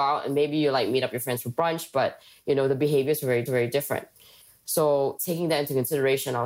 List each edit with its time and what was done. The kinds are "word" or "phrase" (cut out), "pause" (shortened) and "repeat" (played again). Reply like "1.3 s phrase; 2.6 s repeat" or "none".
3.5 s repeat